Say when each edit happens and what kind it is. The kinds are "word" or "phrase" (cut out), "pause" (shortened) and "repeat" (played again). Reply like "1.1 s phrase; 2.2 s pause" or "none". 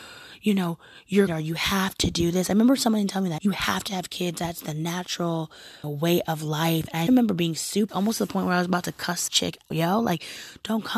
1.3 s phrase; 3.4 s word; 5.8 s phrase; 7.1 s word; 7.9 s phrase; 9.3 s word; 9.7 s word